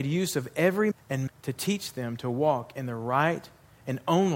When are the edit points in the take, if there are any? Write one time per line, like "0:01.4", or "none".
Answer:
0:00.9
0:01.3